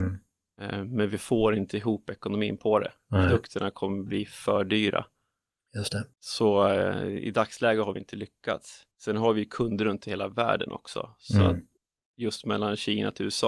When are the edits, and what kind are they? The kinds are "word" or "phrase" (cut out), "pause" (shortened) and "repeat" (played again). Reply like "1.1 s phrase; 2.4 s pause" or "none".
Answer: 8.9 s pause